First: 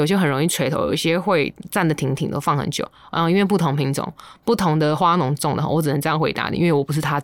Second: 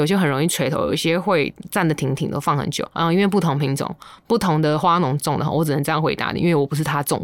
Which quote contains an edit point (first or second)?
second